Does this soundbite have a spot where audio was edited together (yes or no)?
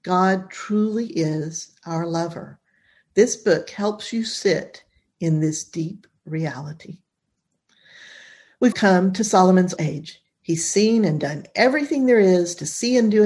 yes